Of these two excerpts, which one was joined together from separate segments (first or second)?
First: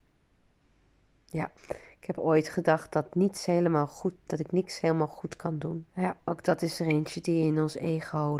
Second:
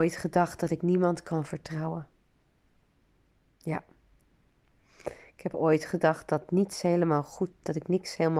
first